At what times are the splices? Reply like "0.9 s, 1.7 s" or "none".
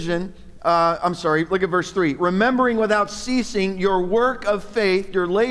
none